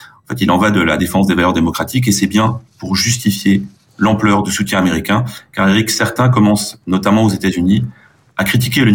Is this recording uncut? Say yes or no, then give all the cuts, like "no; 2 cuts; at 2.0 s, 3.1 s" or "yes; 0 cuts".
yes; 0 cuts